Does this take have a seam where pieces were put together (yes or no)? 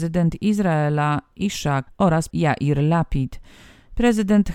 yes